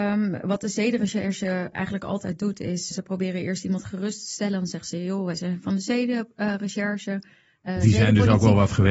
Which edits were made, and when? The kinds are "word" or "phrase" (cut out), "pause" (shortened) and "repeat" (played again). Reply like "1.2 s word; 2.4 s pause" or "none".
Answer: 1.7 s word; 2.9 s word